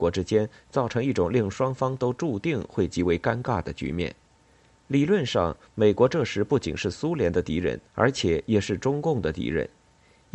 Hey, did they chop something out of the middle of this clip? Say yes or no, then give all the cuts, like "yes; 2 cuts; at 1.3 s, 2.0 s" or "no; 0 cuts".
yes; 2 cuts; at 4.3 s, 7.9 s